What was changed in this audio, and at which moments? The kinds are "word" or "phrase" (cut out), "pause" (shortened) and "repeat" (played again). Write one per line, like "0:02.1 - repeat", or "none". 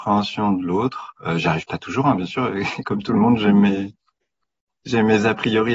none